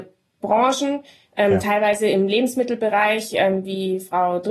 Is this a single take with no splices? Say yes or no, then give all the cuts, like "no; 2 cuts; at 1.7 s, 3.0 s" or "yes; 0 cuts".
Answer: yes; 0 cuts